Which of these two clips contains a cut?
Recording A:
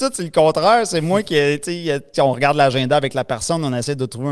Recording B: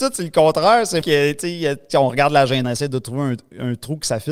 B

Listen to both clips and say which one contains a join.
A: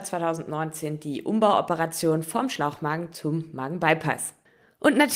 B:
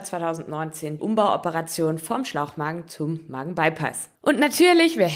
B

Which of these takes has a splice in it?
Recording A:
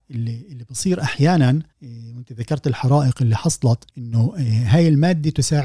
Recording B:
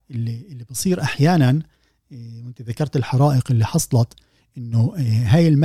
A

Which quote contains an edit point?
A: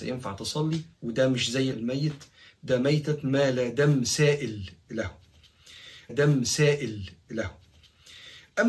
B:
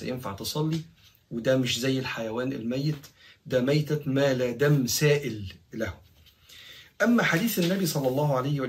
A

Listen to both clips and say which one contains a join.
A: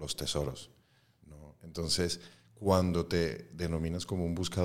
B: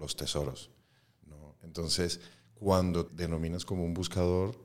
B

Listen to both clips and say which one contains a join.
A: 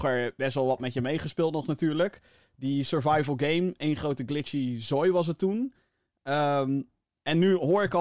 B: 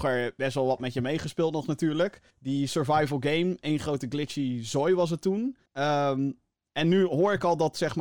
B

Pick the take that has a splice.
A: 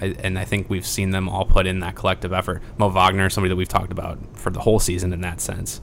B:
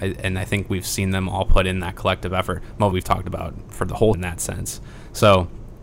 B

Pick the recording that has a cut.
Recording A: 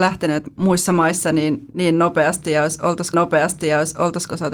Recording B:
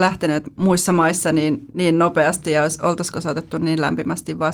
A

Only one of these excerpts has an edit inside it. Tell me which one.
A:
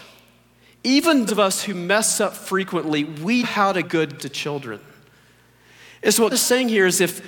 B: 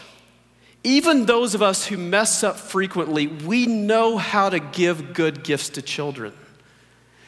A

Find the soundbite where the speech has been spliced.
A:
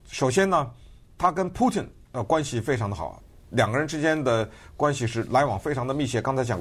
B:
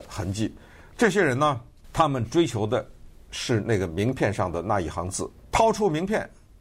B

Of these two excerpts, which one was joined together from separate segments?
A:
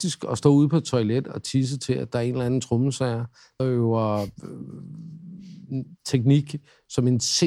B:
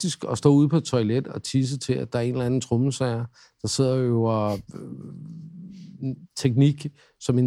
A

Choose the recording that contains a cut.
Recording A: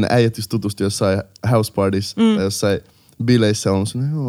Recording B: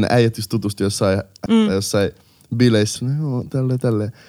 B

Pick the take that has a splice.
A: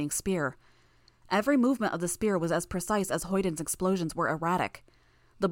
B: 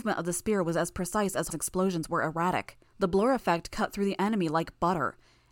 B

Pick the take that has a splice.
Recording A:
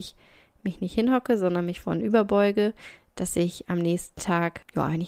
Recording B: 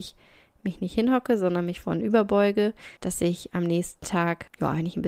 B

